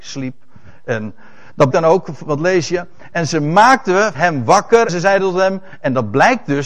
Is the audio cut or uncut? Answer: cut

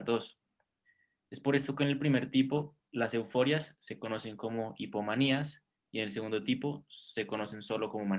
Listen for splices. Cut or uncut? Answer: uncut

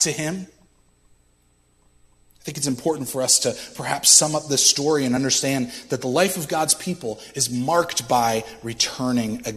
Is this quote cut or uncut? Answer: uncut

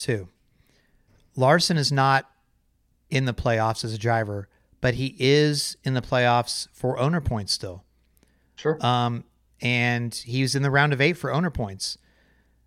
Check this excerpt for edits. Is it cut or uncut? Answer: uncut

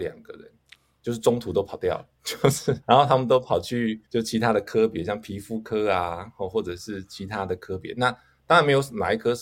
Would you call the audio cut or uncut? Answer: cut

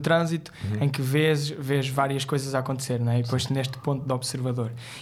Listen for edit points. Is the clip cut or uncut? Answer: uncut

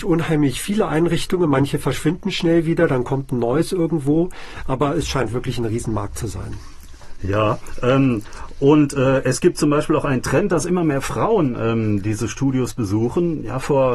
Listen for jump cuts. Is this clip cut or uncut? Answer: uncut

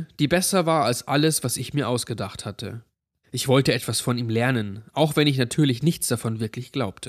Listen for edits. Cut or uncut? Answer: uncut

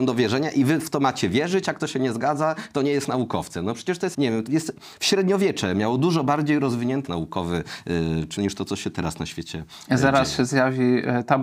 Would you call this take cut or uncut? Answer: cut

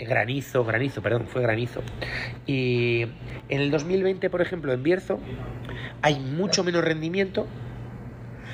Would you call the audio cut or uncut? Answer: uncut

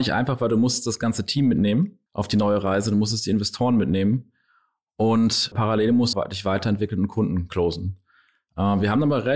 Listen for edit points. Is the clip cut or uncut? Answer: cut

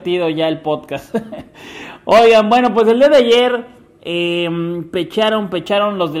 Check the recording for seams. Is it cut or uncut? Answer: uncut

